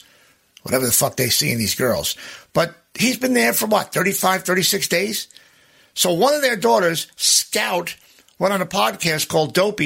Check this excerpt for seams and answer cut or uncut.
uncut